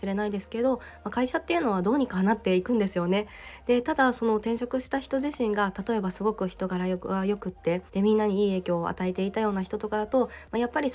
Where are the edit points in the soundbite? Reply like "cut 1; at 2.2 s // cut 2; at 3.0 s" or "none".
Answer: cut 1; at 7.9 s